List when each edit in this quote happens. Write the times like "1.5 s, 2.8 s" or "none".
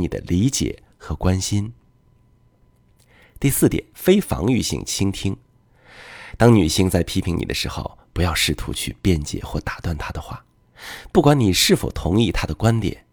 3.9 s

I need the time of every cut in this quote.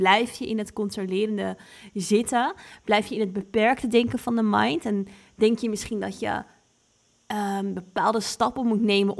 none

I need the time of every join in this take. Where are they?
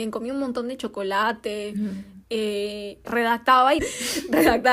3.0 s, 3.8 s

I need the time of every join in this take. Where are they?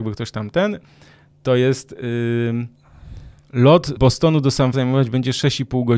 4.0 s, 4.7 s

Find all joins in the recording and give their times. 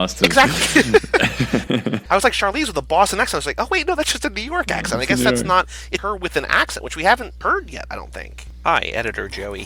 6.0 s

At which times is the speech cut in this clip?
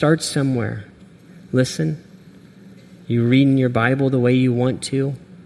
none

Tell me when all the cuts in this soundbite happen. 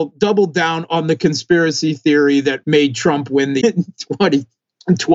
2.6 s, 3.6 s

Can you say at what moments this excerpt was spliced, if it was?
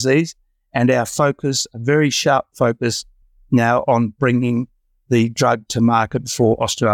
none

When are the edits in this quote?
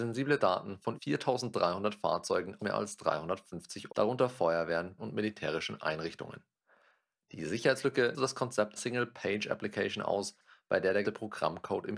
0.9 s, 2.6 s, 3.9 s, 5.0 s, 8.1 s, 8.8 s, 11.0 s

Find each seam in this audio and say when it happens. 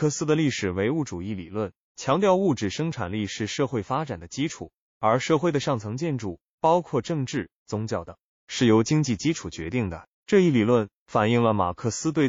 7.6 s, 10.1 s

